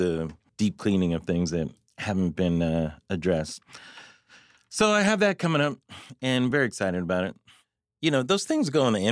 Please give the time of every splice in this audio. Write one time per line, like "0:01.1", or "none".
none